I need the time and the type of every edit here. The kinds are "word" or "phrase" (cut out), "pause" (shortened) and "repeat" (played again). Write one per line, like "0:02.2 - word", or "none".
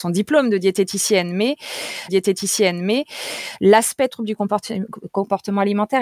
0:02.1 - repeat